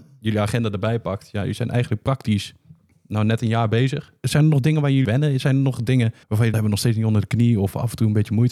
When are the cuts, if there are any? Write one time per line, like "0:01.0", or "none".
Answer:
0:05.0
0:06.2
0:06.5